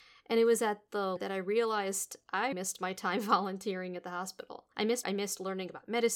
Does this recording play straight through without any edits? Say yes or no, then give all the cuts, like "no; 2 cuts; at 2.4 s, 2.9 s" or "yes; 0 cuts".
no; 4 cuts; at 1.2 s, 2.5 s, 4.7 s, 5.0 s